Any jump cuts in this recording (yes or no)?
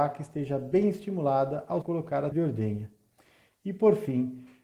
yes